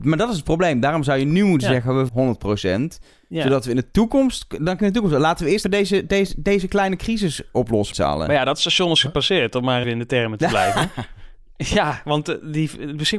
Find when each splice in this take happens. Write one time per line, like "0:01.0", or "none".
0:02.1
0:04.8
0:05.6
0:07.9
0:09.8